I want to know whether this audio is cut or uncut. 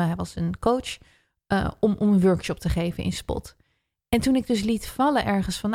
uncut